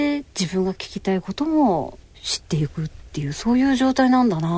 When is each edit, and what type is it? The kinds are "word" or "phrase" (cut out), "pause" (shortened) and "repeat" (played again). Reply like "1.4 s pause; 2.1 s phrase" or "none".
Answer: 2.0 s pause